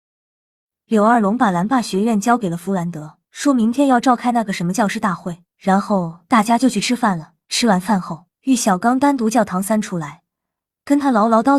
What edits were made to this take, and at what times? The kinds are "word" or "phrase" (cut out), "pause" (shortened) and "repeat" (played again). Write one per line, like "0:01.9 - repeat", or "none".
0:03.2 - pause
0:05.5 - pause
0:07.4 - pause
0:08.3 - pause